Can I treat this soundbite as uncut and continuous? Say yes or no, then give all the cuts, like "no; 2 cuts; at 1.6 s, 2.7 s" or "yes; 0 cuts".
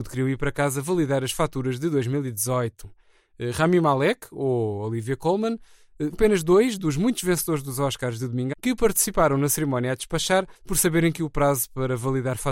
no; 3 cuts; at 6.1 s, 8.5 s, 10.6 s